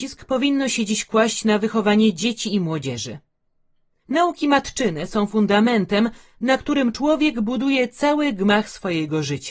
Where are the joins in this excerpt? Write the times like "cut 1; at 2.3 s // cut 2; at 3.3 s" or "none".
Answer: none

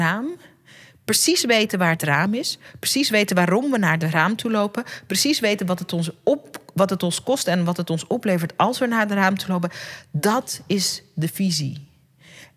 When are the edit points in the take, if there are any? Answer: none

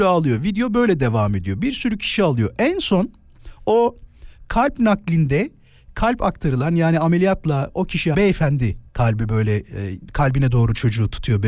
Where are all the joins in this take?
cut 1; at 8.1 s // cut 2; at 8.9 s

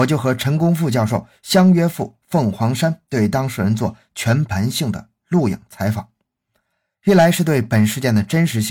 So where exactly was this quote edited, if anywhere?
none

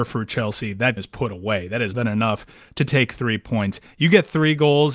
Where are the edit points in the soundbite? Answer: cut 1; at 1.0 s // cut 2; at 1.9 s

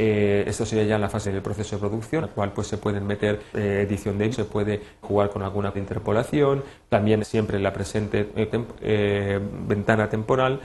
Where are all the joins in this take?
cut 1; at 1.2 s // cut 2; at 2.2 s // cut 3; at 3.5 s // cut 4; at 4.3 s // cut 5; at 5.0 s // cut 6; at 5.7 s // cut 7; at 7.2 s // cut 8; at 8.5 s

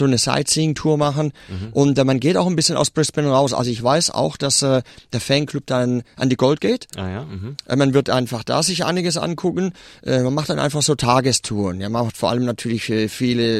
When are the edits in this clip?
cut 1; at 6.6 s

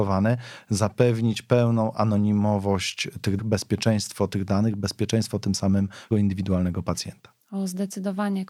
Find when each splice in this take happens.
cut 1; at 3.4 s // cut 2; at 6.1 s

